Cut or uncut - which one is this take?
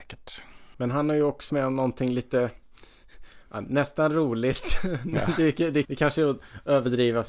cut